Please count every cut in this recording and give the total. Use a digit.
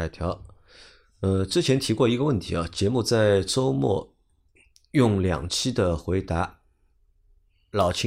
0